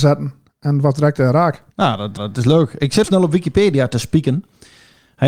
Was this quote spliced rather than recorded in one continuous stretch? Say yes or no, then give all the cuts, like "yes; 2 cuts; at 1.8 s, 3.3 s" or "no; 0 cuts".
yes; 3 cuts; at 1.7 s, 2.2 s, 3.0 s